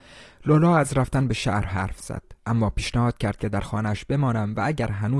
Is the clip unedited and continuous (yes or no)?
no